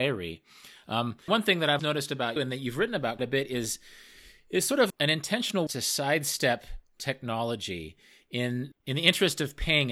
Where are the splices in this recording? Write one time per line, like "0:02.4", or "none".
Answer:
0:01.3
0:01.8
0:02.4
0:03.2
0:04.9
0:05.7
0:08.7